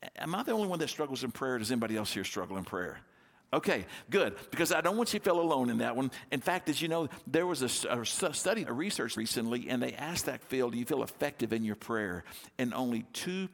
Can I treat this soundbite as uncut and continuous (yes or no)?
no